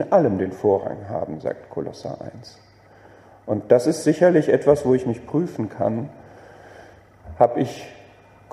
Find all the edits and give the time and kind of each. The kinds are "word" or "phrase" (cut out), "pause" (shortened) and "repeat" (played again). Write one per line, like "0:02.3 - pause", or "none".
none